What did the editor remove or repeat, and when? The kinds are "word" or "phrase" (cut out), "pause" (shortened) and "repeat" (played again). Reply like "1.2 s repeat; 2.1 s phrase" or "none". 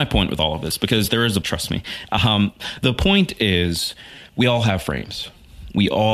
1.4 s word; 4.3 s pause